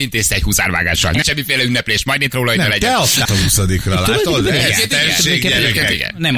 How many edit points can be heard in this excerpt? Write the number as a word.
three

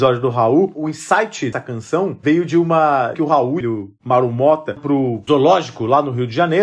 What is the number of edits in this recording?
four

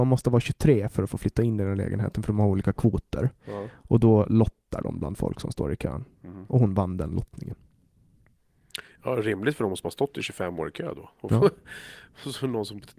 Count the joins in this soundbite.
zero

